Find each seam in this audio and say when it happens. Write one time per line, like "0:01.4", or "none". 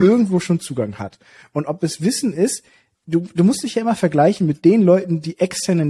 none